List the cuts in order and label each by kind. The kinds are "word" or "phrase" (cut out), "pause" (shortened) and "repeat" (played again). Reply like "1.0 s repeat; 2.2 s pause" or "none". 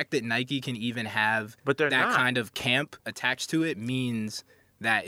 1.6 s pause